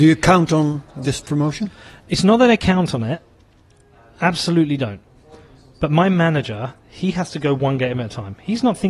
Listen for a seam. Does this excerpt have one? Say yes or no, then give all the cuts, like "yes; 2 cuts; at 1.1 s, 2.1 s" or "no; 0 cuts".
no; 0 cuts